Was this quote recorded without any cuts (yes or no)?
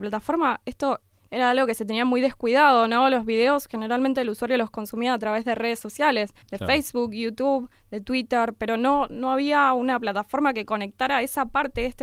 no